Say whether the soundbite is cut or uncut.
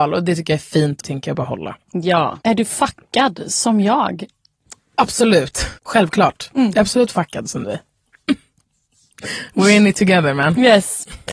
cut